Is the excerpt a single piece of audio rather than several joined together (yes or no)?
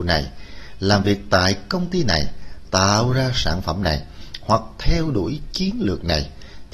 yes